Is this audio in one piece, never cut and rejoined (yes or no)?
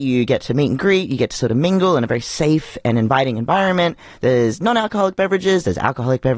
yes